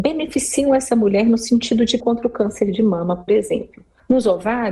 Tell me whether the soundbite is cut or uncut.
cut